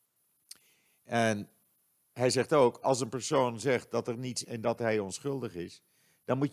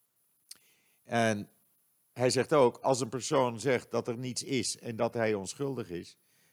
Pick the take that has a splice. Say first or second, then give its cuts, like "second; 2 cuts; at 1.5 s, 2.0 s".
first; 1 cut; at 4.4 s